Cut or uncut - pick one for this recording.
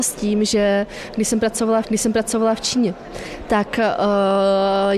cut